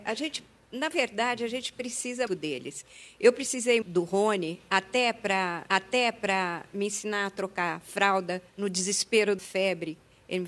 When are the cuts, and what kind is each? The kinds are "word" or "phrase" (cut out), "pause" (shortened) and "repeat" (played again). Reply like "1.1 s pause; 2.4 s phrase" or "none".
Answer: 2.3 s word; 3.8 s word; 5.7 s repeat; 8.5 s pause; 9.4 s word